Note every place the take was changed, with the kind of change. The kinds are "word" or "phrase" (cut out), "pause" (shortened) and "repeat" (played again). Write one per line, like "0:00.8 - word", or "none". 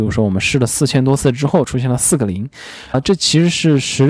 0:02.9 - word